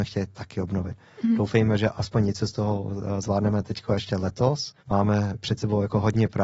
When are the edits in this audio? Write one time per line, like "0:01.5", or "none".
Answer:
0:04.8